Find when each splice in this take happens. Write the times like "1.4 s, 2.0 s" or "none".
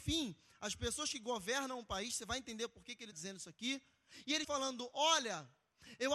3.1 s, 4.4 s